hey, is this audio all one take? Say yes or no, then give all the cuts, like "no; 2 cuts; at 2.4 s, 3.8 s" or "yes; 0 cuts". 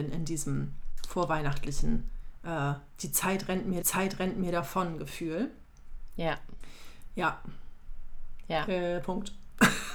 no; 1 cut; at 3.8 s